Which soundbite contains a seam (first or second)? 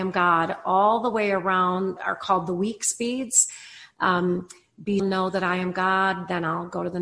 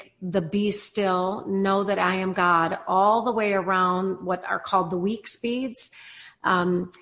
first